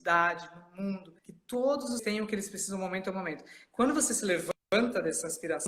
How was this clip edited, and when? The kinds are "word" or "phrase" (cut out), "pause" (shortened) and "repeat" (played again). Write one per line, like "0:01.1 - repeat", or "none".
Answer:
0:01.2 - pause
0:02.0 - word